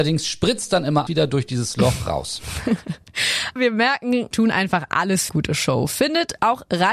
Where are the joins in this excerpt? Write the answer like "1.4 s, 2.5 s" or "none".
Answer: 1.1 s, 3.6 s, 4.3 s, 5.3 s